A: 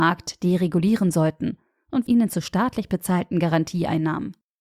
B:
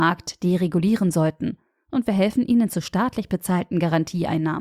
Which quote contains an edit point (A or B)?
A